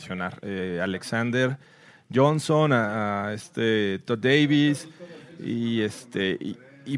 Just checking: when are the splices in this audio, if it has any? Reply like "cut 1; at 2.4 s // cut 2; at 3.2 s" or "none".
none